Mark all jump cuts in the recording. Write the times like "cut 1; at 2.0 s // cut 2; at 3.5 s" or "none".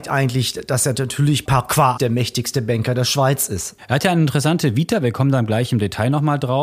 cut 1; at 0.9 s // cut 2; at 1.5 s // cut 3; at 2.0 s